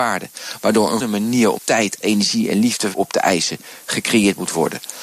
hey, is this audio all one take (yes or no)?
no